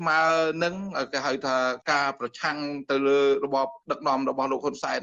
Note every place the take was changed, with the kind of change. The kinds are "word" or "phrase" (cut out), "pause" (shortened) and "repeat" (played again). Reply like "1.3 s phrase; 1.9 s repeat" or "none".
1.8 s pause